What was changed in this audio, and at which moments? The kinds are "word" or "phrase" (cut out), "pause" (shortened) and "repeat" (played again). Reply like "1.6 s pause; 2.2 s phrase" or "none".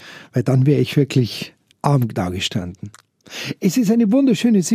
1.7 s pause